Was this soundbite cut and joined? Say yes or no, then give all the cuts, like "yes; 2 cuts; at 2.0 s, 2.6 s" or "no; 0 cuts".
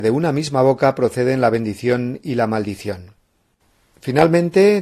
no; 0 cuts